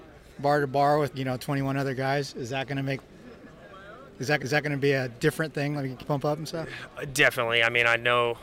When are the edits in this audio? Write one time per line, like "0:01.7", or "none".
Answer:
0:01.1
0:04.4
0:06.0